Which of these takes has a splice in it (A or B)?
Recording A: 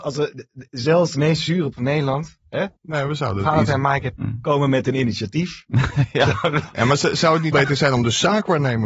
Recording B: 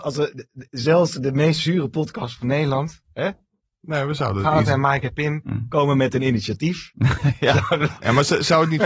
A